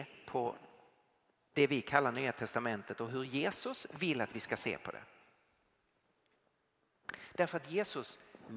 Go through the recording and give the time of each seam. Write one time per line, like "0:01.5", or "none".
none